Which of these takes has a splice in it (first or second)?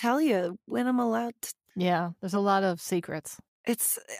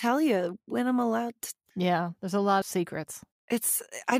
second